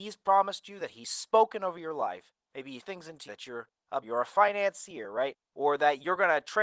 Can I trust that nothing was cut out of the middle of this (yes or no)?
no